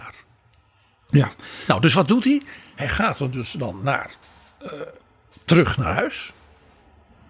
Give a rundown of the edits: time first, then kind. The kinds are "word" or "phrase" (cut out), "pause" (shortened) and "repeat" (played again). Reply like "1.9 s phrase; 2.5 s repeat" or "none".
none